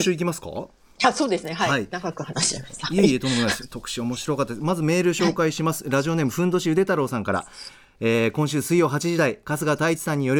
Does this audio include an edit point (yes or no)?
no